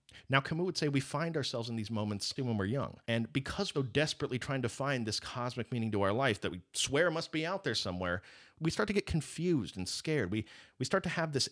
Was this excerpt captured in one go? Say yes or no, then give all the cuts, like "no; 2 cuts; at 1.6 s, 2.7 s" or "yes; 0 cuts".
no; 4 cuts; at 2.4 s, 3.0 s, 3.7 s, 8.5 s